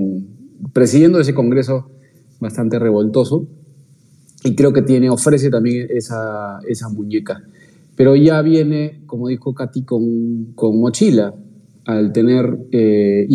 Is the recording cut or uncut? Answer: uncut